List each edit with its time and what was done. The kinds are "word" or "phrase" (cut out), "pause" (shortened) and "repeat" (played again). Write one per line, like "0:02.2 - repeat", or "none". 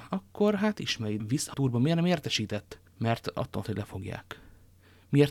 0:01.2 - word
0:01.5 - word
0:02.9 - pause
0:03.6 - word